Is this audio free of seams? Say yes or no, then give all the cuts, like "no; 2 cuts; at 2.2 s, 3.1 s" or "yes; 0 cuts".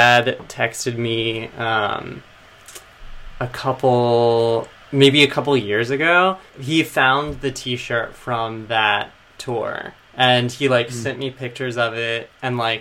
no; 3 cuts; at 4.7 s, 6.5 s, 10.0 s